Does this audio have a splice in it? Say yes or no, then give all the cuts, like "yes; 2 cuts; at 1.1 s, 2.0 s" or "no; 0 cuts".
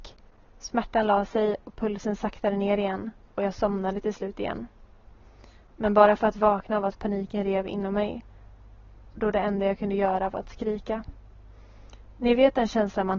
no; 0 cuts